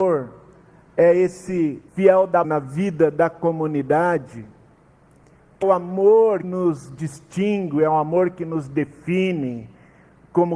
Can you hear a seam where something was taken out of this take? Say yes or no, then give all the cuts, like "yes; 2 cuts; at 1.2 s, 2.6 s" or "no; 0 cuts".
yes; 4 cuts; at 1.9 s, 2.4 s, 5.6 s, 6.4 s